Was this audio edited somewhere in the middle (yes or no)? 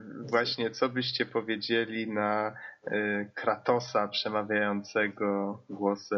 no